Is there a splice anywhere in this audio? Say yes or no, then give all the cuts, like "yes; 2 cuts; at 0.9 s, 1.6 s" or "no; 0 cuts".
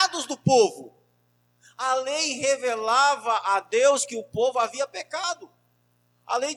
no; 0 cuts